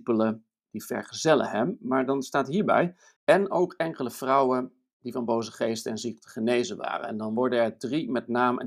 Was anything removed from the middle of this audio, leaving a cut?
no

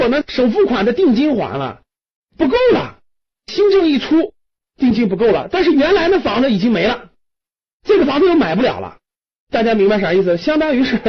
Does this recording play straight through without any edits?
yes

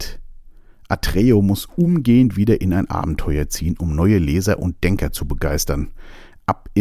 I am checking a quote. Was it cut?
no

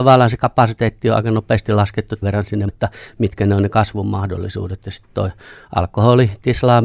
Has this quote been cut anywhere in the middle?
yes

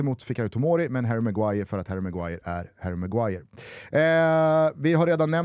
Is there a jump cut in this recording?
no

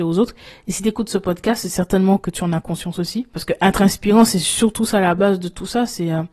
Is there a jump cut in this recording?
no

